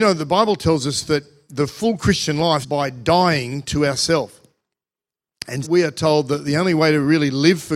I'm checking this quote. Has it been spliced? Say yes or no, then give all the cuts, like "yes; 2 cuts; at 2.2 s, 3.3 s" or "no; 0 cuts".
yes; 2 cuts; at 2.6 s, 5.6 s